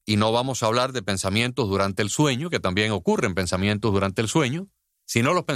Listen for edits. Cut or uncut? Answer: uncut